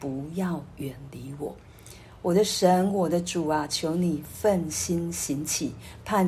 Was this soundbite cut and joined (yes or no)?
no